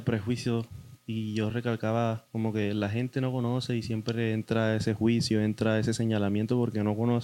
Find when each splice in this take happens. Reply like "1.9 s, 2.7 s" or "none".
none